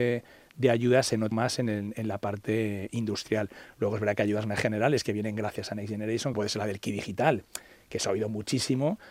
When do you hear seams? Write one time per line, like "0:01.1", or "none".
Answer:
0:01.3
0:06.3